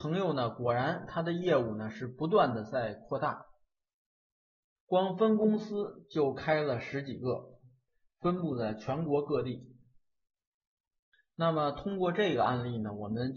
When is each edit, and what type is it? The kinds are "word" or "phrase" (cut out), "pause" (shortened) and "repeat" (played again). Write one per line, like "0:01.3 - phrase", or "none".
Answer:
none